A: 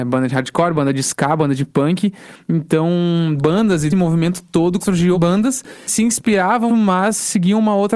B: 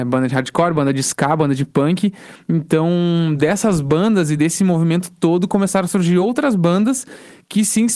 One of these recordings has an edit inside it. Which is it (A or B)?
A